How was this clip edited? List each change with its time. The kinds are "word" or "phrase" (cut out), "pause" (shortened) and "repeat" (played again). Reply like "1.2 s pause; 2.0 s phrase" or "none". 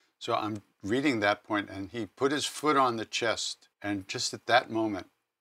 3.7 s pause